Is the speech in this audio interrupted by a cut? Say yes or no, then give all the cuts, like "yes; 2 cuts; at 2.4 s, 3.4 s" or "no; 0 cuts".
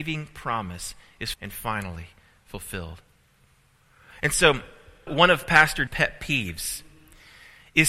yes; 3 cuts; at 1.3 s, 5.1 s, 5.9 s